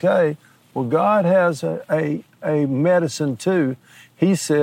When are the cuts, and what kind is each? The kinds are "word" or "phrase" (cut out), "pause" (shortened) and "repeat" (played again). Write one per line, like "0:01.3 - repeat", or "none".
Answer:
none